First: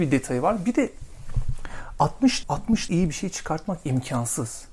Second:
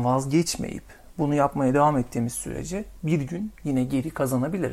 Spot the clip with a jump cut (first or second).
first